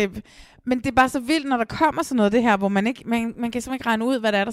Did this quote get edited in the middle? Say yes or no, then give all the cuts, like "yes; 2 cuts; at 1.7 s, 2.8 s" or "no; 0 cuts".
no; 0 cuts